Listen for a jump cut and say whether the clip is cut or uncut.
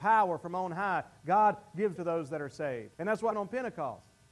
cut